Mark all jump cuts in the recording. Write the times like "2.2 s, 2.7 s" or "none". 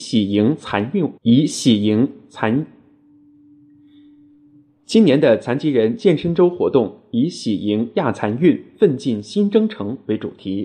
1.2 s